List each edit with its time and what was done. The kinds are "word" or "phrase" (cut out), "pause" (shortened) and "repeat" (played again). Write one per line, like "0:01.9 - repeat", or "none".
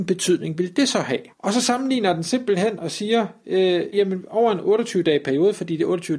0:01.3 - pause
0:03.9 - word